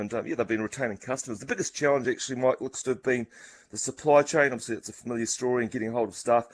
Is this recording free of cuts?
yes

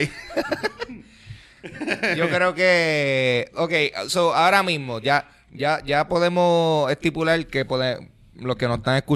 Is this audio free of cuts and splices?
yes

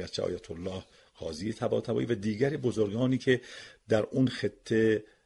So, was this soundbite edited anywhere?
no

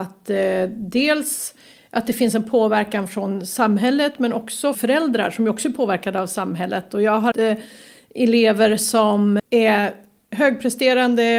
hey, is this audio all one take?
no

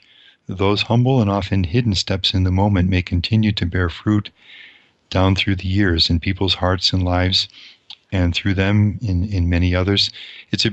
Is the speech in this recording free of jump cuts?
yes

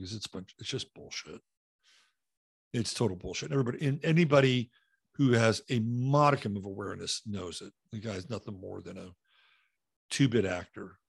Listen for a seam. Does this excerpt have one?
no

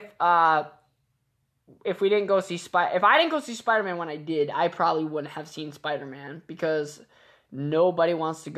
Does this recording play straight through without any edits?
yes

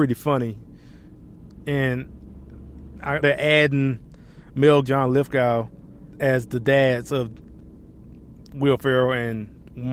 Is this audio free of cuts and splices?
no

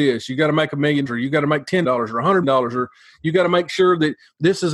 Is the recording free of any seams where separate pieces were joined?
no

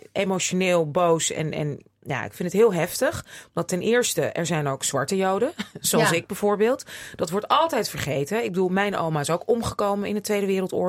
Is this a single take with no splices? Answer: yes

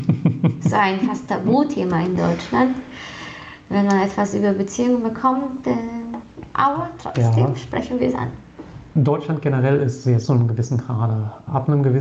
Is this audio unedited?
no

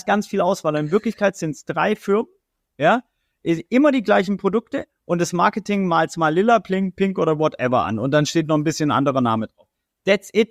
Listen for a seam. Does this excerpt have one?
no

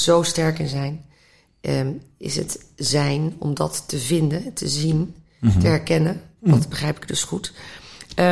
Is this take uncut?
yes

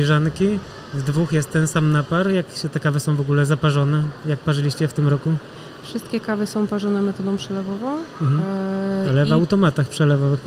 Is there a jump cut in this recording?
no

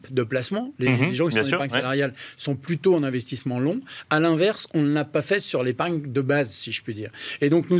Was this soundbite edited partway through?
no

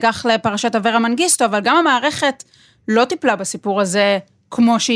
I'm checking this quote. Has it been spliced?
no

